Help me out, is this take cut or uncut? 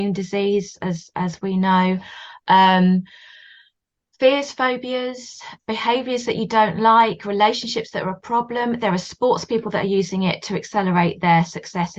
uncut